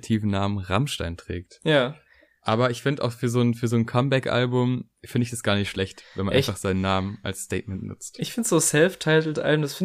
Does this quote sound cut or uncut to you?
uncut